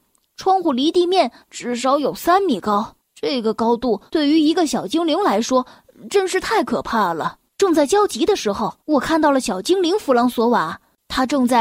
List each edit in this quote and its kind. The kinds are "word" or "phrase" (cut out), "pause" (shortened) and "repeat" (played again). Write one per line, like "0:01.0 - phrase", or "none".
0:01.4 - pause
0:03.0 - pause
0:04.1 - pause
0:07.5 - pause
0:08.8 - pause